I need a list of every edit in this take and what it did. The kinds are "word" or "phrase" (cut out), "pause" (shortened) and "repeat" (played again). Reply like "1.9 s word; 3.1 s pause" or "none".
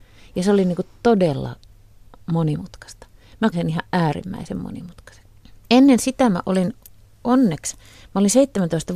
3.5 s word